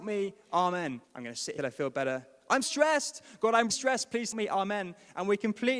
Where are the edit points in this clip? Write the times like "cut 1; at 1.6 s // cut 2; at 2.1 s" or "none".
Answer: cut 1; at 1.0 s // cut 2; at 1.6 s // cut 3; at 2.6 s // cut 4; at 3.7 s // cut 5; at 4.3 s